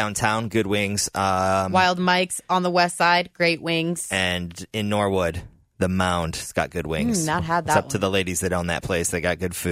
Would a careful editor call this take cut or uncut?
uncut